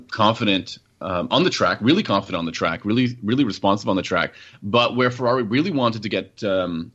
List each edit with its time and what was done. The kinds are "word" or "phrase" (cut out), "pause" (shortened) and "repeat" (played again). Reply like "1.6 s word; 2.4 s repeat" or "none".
none